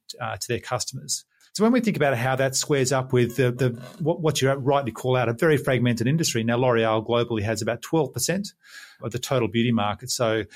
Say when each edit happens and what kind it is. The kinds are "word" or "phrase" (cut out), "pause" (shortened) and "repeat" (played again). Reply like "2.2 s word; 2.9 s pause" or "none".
none